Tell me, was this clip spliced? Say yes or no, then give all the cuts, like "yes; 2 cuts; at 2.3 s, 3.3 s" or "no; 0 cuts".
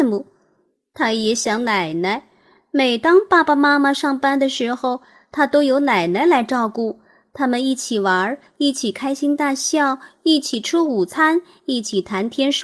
no; 0 cuts